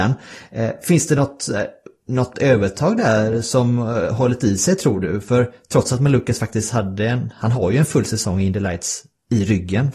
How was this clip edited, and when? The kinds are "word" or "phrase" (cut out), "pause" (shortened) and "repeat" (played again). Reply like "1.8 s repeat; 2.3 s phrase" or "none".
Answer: 2.3 s word